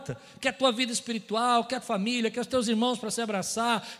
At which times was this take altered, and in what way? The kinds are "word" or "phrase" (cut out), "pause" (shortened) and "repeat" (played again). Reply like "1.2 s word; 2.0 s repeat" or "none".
1.8 s word